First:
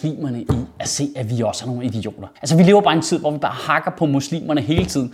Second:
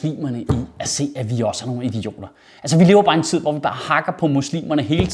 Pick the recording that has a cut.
first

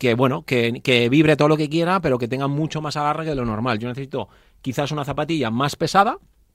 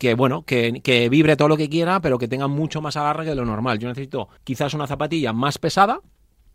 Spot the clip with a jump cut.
second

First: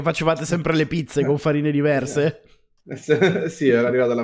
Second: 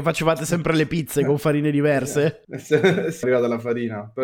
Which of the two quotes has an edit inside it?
second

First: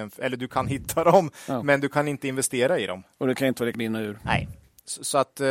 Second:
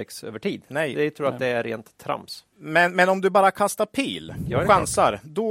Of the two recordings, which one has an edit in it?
first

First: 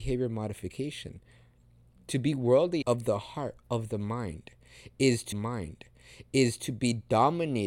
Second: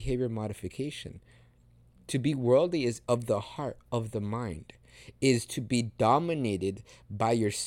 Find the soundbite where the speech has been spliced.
first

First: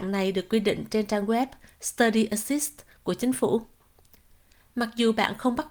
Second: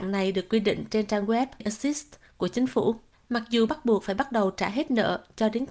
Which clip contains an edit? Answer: second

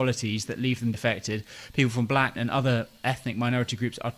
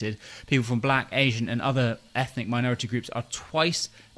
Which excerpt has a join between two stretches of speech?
first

